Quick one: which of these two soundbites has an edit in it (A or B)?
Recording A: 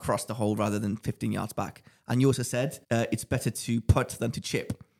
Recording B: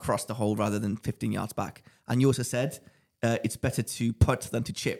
A